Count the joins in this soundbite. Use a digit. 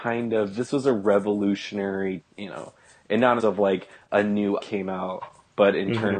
3